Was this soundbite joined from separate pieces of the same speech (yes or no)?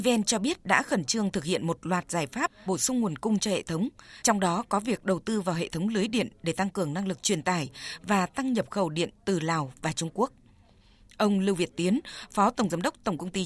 yes